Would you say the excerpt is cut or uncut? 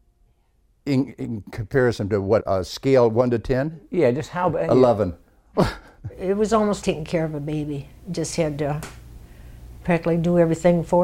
cut